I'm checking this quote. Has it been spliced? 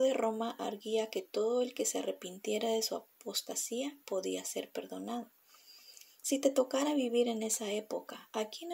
no; 0 cuts

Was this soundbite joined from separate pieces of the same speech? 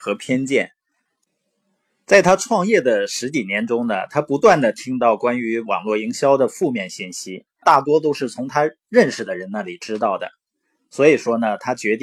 yes; 1 cut; at 7.6 s

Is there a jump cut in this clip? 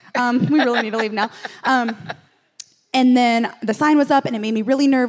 no; 0 cuts

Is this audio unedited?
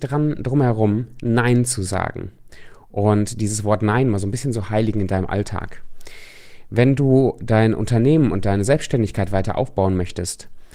yes; 0 cuts

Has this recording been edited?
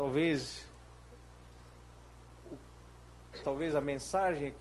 yes; 1 cut; at 3.4 s

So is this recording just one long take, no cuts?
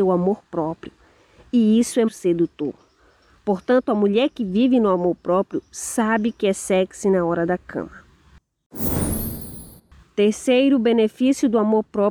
no; 2 cuts; at 2.1 s, 9.8 s

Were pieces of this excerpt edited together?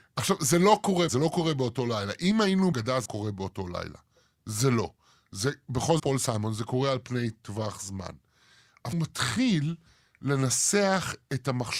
yes; 5 cuts; at 1.1 s, 2.7 s, 3.0 s, 6.0 s, 8.9 s

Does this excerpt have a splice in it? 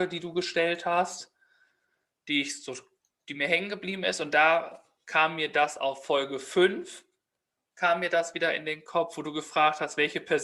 yes; 1 cut; at 3.0 s

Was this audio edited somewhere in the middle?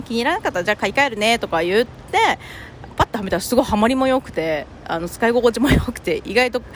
yes; 1 cut; at 2.9 s

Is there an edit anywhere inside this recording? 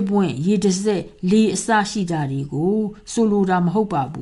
no; 0 cuts

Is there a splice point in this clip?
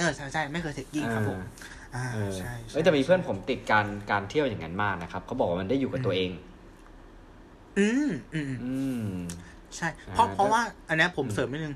no; 0 cuts

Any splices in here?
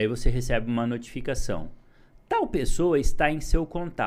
no; 0 cuts

